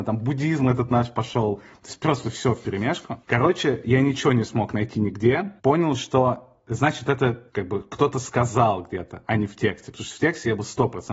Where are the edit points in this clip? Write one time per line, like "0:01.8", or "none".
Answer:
0:03.2
0:05.6
0:07.5